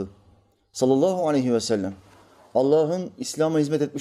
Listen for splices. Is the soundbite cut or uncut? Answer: uncut